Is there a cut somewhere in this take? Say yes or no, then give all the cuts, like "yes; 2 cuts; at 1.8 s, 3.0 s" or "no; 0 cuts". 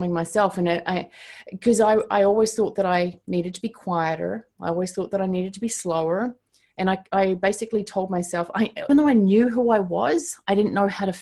yes; 1 cut; at 8.9 s